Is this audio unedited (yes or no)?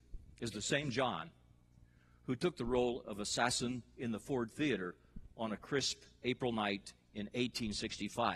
yes